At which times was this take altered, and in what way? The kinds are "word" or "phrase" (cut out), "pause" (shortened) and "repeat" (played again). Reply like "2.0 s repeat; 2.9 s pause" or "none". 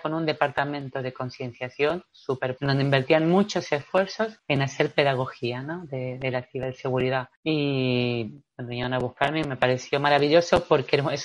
2.6 s word